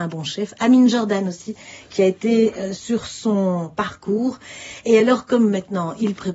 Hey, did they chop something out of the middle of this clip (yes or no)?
no